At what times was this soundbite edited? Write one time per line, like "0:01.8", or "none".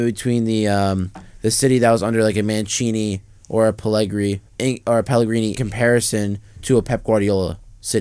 0:04.5
0:05.6